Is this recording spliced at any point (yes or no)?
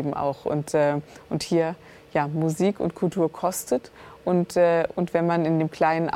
no